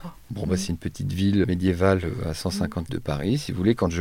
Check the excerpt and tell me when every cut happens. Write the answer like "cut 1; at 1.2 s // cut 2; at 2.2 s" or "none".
cut 1; at 1.4 s // cut 2; at 2.9 s